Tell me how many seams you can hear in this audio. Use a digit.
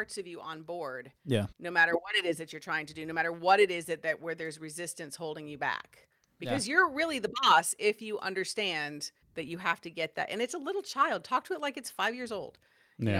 2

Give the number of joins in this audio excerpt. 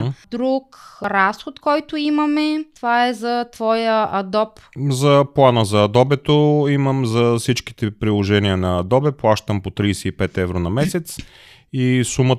1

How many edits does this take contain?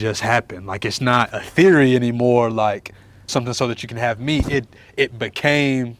1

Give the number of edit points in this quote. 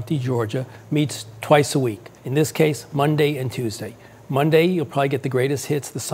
1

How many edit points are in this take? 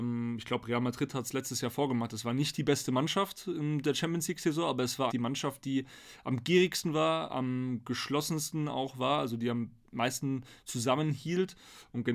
1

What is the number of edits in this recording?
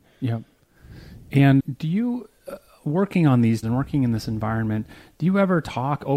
2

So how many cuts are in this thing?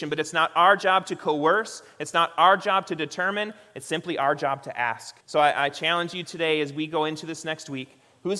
1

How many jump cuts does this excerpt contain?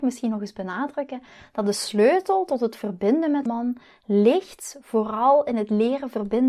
1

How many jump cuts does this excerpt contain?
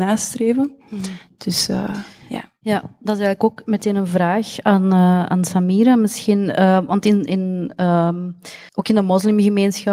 1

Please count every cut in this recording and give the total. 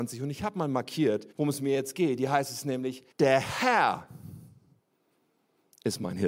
2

